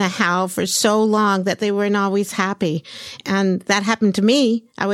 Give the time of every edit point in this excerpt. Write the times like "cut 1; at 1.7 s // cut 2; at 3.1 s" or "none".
none